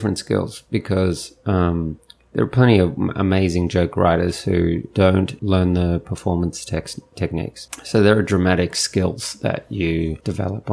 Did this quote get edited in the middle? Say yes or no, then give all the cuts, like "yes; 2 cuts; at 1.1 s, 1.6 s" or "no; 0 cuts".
no; 0 cuts